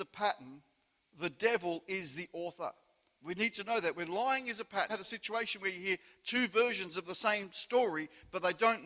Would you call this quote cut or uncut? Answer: cut